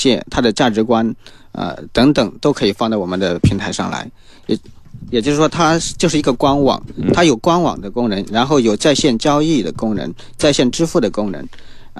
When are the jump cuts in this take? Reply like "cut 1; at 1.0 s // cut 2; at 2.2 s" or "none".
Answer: none